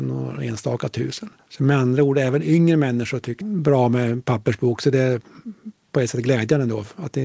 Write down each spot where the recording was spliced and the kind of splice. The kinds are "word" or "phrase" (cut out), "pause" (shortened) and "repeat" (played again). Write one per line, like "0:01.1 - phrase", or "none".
0:01.4 - pause
0:03.4 - phrase